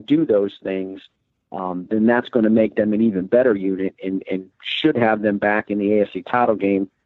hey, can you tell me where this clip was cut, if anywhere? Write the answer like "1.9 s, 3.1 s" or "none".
none